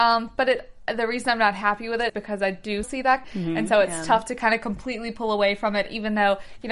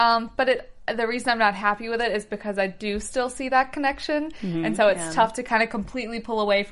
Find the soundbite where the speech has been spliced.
first; 3 cuts; at 2.1 s, 2.8 s, 3.2 s

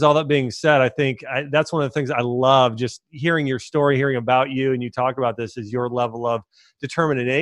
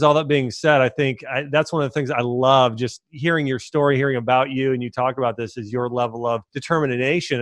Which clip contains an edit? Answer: second; 1 cut; at 6.5 s

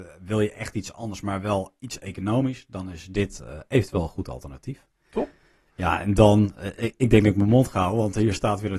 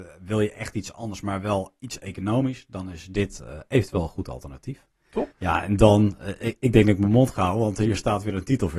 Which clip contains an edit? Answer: second; 1 cut; at 5.3 s

